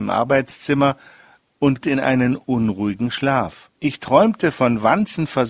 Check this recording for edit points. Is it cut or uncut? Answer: cut